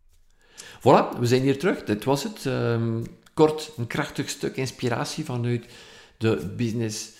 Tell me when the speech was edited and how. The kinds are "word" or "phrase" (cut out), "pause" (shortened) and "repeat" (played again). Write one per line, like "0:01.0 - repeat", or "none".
none